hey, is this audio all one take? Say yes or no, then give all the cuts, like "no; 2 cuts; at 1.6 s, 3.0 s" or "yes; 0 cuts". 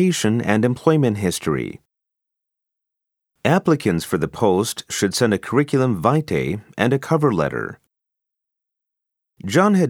yes; 0 cuts